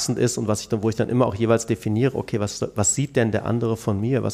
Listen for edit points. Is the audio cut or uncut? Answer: uncut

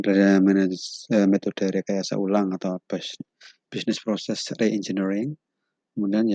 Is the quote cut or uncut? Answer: uncut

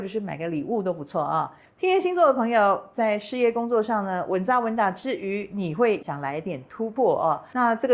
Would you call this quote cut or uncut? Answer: uncut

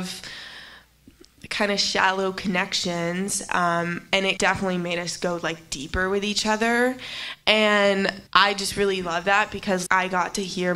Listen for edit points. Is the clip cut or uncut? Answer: cut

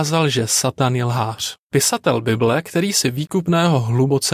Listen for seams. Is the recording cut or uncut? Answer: cut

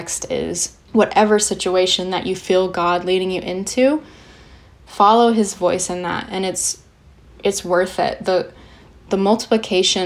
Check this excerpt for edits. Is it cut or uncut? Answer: uncut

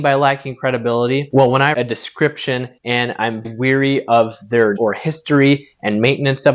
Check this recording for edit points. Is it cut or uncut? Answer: cut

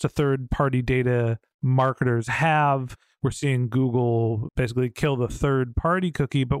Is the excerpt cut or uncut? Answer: uncut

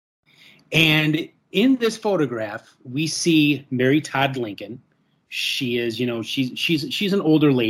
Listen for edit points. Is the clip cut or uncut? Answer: uncut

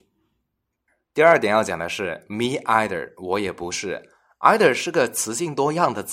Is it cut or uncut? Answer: uncut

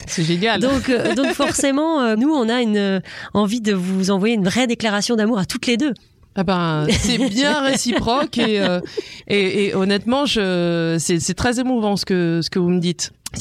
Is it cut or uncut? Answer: uncut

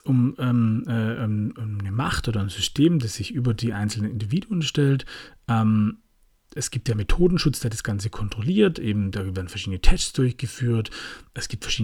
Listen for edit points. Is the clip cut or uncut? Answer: uncut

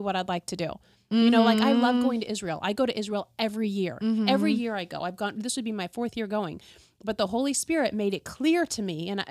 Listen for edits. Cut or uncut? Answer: uncut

